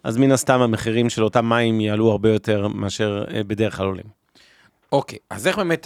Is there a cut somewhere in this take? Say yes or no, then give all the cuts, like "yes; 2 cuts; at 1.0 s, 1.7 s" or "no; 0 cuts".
no; 0 cuts